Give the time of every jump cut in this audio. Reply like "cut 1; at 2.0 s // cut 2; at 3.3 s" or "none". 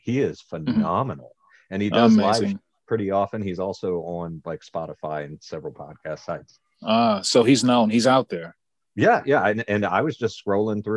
none